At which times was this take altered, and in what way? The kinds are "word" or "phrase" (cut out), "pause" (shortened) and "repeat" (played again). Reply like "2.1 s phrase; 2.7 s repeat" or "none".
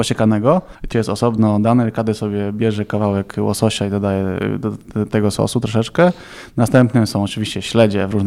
0.9 s word